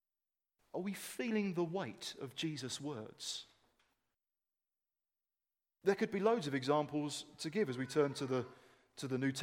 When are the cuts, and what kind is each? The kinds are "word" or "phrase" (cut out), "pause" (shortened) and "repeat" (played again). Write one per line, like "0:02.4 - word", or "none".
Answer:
none